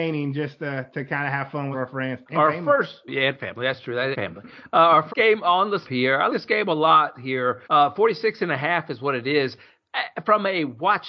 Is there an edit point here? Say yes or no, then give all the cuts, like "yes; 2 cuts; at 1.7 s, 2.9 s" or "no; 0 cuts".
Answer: yes; 8 cuts; at 1.7 s, 2.3 s, 3.1 s, 4.1 s, 5.1 s, 5.8 s, 6.3 s, 7.6 s